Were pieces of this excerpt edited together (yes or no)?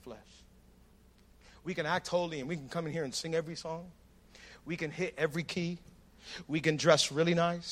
no